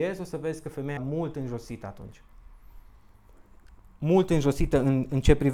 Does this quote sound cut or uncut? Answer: cut